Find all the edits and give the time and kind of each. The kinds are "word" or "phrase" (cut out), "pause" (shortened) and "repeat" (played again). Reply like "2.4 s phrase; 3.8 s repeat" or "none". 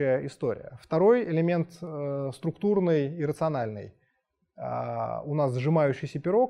none